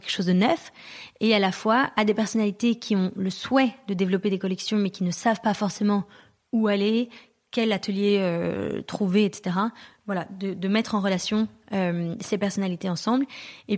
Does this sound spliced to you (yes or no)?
no